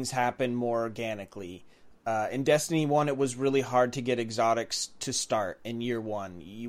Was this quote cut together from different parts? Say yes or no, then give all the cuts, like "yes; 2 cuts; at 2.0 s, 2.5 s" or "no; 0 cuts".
no; 0 cuts